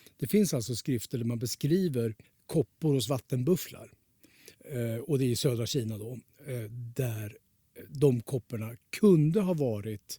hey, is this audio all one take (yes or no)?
no